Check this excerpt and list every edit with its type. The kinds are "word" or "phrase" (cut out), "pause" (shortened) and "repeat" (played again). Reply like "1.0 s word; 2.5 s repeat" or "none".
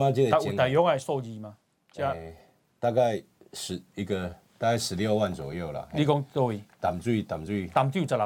none